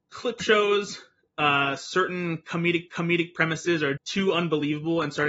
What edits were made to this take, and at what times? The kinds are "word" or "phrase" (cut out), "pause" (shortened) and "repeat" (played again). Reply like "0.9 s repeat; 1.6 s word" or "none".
2.9 s repeat; 4.0 s word